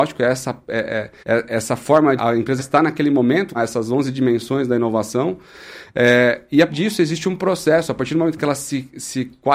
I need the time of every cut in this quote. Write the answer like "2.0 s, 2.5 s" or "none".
1.2 s, 2.2 s, 2.6 s, 3.5 s, 6.7 s